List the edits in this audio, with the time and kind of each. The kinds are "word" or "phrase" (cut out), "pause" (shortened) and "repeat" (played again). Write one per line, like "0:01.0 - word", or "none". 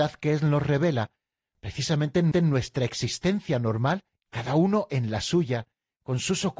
0:02.3 - repeat
0:04.1 - pause

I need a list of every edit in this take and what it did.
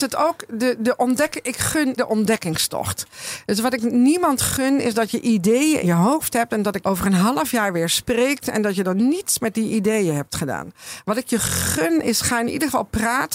0:02.0 - word
0:05.8 - word
0:06.8 - word

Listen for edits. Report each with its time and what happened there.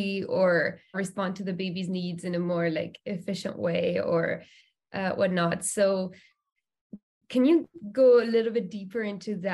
0:00.9 - word

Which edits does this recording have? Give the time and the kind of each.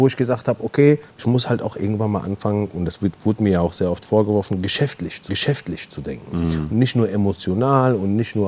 0:01.1 - pause
0:05.3 - repeat

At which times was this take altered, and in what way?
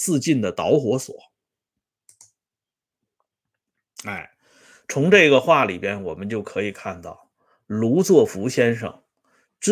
none

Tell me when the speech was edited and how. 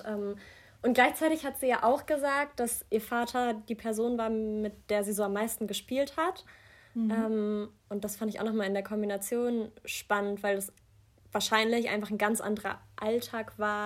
none

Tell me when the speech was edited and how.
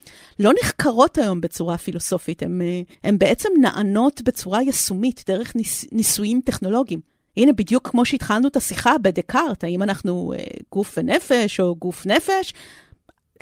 0:02.9 - pause
0:07.1 - pause

